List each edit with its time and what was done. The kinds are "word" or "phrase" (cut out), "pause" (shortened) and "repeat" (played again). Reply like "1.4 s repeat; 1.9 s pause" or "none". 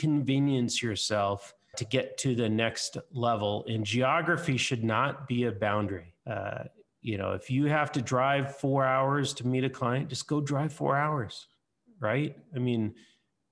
1.7 s word; 6.2 s pause